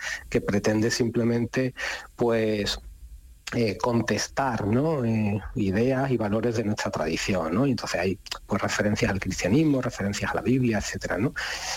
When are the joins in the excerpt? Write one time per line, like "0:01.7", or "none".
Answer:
0:03.4